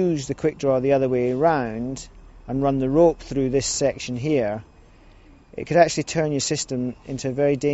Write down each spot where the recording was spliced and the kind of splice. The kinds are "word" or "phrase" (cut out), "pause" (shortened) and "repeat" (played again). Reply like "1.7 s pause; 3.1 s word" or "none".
none